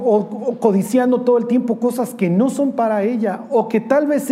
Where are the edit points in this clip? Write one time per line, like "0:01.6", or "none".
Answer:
none